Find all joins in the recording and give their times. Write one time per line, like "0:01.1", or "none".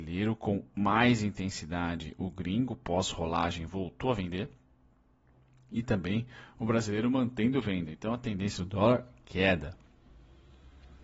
none

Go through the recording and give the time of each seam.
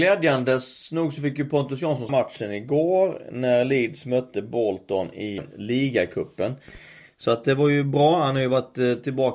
0:02.1
0:05.4

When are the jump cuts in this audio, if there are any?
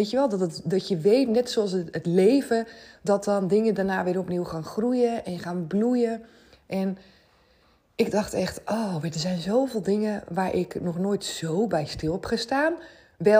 none

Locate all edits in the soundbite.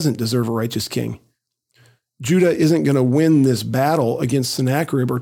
none

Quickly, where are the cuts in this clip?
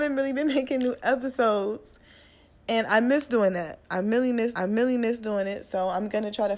0:04.5

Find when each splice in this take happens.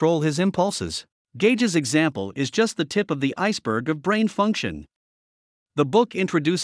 0:01.1

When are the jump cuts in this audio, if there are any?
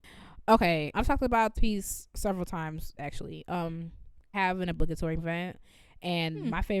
0:00.9
0:01.5
0:03.0
0:04.3
0:05.2

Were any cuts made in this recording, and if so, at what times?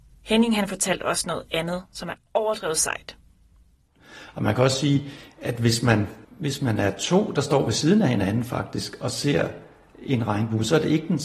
0:06.2

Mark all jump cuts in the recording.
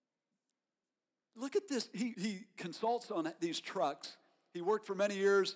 0:02.1

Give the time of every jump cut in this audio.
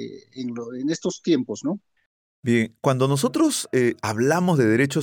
0:02.0

